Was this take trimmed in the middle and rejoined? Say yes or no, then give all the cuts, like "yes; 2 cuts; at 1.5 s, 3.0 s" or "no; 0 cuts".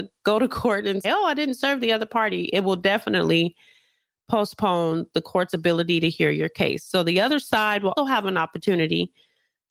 yes; 2 cuts; at 1.0 s, 8.0 s